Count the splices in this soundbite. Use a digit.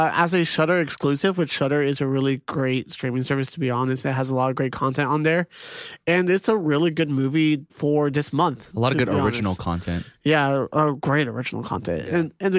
1